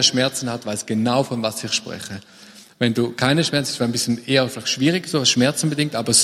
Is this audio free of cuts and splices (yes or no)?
yes